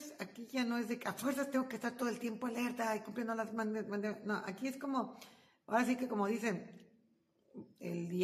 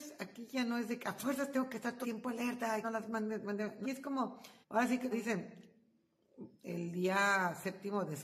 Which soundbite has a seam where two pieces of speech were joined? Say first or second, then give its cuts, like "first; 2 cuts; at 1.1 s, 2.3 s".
second; 5 cuts; at 2.0 s, 2.8 s, 3.8 s, 4.6 s, 5.1 s